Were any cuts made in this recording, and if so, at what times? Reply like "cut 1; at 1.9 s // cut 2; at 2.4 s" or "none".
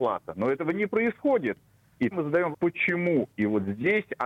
cut 1; at 2.1 s // cut 2; at 2.5 s